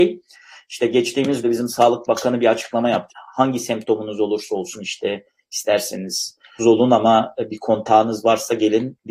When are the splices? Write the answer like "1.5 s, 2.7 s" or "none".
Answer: 1.4 s, 3.1 s, 6.6 s